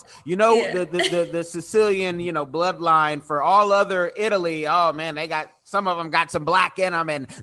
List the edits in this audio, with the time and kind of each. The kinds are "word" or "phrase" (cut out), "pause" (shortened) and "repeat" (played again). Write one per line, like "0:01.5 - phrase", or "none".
none